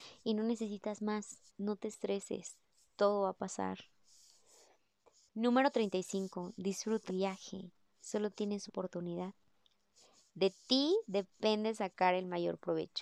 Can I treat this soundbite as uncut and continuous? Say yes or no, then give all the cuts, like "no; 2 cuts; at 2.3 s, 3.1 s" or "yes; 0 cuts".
no; 3 cuts; at 1.5 s, 7.1 s, 8.7 s